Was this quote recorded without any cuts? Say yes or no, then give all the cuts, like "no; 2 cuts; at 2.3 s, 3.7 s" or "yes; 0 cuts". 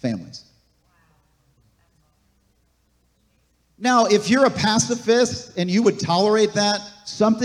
yes; 0 cuts